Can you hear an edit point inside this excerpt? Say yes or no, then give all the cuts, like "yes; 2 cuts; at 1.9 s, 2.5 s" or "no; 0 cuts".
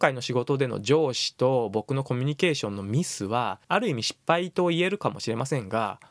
yes; 1 cut; at 3.6 s